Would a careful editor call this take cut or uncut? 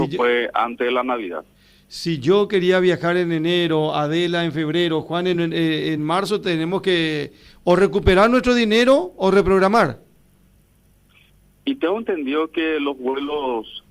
uncut